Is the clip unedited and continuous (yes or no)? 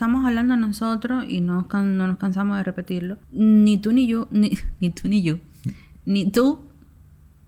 no